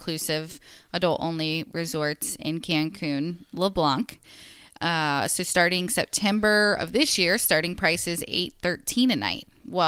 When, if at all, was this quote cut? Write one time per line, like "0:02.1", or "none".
none